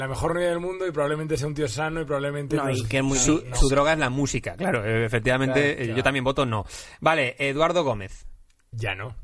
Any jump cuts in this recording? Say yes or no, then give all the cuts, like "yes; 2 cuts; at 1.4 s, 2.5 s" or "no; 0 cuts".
no; 0 cuts